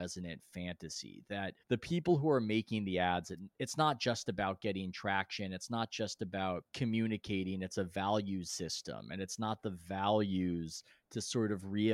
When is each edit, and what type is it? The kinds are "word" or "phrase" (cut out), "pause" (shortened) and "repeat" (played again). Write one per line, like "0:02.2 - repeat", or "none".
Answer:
0:01.6 - pause
0:06.7 - pause